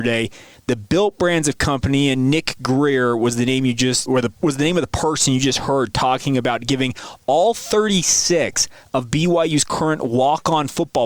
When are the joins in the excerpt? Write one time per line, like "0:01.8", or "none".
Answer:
0:04.1